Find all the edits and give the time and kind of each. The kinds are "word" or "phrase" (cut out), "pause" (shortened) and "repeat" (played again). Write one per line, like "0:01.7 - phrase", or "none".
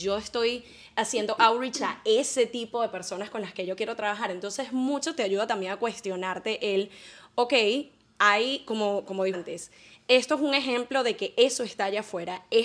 0:09.3 - word